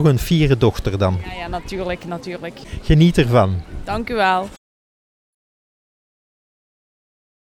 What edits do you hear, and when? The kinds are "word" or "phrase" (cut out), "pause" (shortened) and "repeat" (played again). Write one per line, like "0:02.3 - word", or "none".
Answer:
none